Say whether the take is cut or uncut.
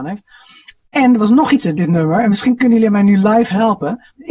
cut